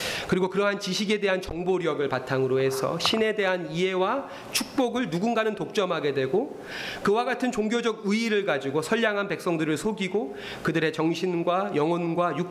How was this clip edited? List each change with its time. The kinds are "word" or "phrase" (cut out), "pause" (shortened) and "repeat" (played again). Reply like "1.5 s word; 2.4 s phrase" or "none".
none